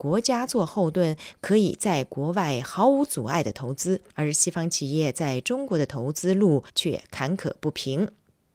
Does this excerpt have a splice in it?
yes; 2 cuts; at 4.1 s, 6.7 s

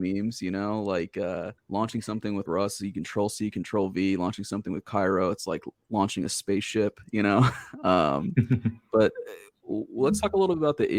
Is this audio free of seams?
no; 2 cuts; at 1.6 s, 2.5 s

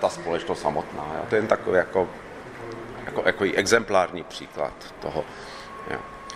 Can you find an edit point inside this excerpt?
no; 0 cuts

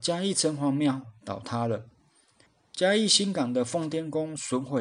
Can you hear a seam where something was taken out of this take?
no; 0 cuts

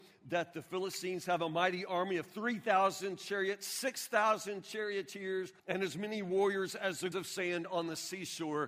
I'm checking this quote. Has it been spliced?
yes; 2 cuts; at 5.6 s, 7.1 s

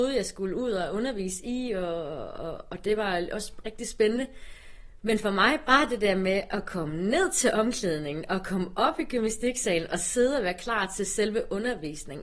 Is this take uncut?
yes; 0 cuts

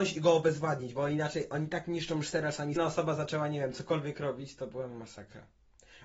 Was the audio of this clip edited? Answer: yes; 1 cut; at 2.8 s

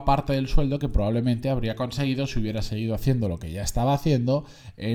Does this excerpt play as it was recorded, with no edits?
yes; 0 cuts

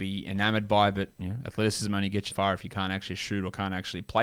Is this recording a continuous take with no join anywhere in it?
no; 1 cut; at 2.3 s

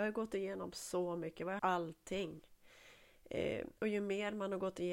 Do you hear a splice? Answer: yes; 2 cuts; at 1.6 s, 3.8 s

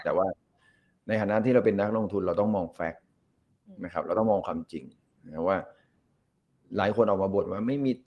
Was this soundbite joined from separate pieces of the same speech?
no; 0 cuts

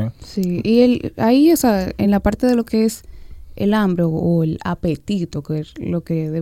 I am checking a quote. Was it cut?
no; 0 cuts

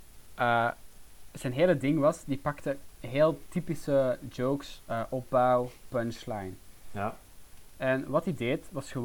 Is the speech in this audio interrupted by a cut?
no; 0 cuts

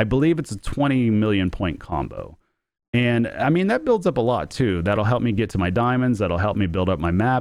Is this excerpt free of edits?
yes; 0 cuts

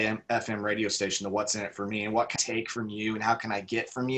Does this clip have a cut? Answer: yes; 1 cut; at 2.4 s

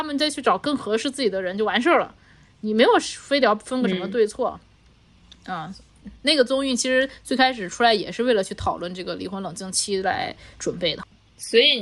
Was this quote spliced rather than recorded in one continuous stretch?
no; 0 cuts

